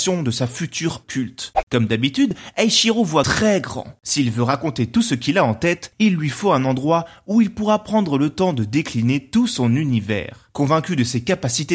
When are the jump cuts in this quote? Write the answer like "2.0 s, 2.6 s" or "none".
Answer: 1.0 s